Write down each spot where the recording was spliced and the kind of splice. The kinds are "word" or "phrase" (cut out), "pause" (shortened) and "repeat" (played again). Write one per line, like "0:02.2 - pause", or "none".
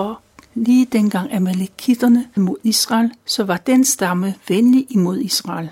0:02.4 - word
0:03.2 - pause